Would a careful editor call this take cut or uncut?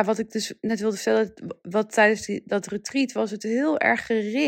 uncut